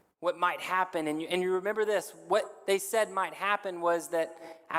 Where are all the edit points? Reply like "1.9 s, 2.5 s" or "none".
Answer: none